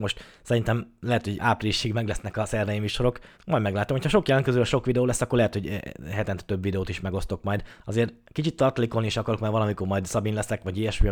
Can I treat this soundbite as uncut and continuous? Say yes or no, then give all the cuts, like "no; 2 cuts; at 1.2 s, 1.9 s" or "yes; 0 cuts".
no; 2 cuts; at 3.3 s, 7.8 s